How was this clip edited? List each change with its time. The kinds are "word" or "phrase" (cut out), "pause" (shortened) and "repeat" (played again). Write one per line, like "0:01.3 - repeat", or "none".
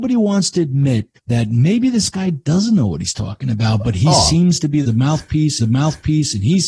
0:01.2 - pause
0:04.8 - phrase
0:05.6 - repeat